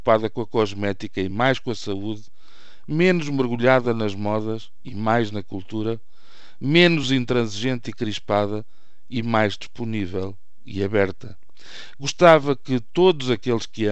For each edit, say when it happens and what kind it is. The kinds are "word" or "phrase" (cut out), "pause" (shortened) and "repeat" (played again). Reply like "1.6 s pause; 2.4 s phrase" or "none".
none